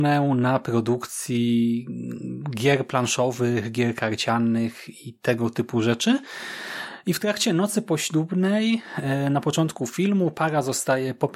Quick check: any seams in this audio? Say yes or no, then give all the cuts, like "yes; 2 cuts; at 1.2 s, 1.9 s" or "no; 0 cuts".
no; 0 cuts